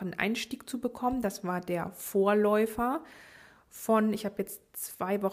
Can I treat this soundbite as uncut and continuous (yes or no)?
yes